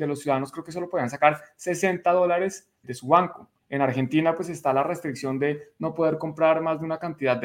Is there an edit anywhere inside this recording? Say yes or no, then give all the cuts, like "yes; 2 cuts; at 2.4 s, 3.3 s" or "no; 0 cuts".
yes; 2 cuts; at 2.8 s, 3.6 s